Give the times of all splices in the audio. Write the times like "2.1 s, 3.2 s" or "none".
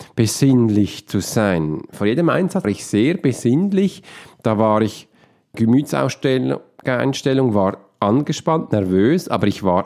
2.6 s, 5.5 s